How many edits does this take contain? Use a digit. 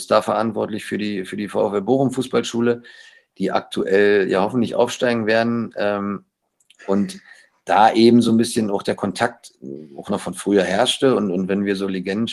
0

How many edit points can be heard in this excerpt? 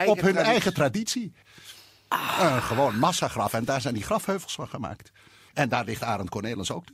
0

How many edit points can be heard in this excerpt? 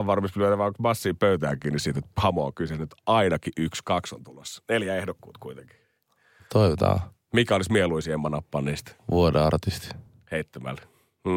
0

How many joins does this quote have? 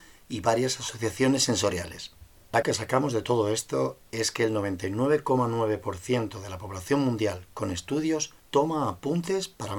2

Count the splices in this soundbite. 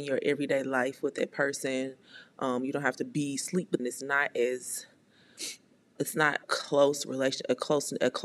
3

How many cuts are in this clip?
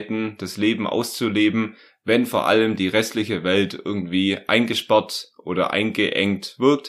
0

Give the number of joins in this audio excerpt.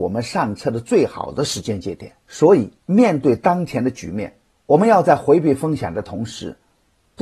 3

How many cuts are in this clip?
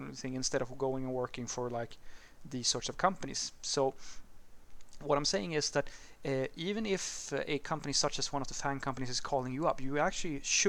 0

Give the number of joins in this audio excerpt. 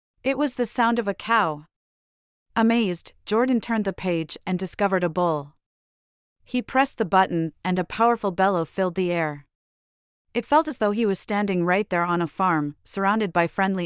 0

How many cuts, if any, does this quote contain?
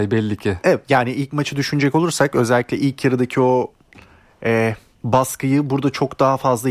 1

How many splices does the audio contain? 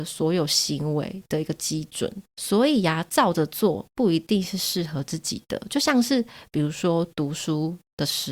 1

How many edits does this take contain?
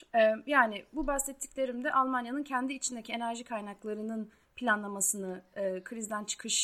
0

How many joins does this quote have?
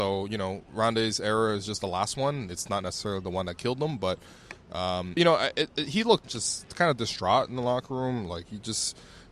2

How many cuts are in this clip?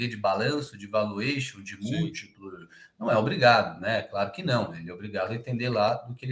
0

